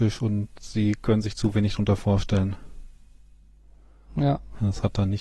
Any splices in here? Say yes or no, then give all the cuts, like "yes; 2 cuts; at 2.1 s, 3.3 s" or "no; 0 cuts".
no; 0 cuts